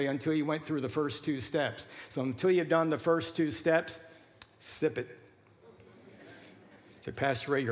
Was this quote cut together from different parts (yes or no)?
no